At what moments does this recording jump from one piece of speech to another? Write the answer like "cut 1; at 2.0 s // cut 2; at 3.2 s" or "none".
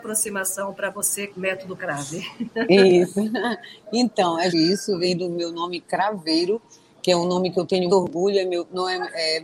cut 1; at 1.3 s // cut 2; at 4.5 s // cut 3; at 7.9 s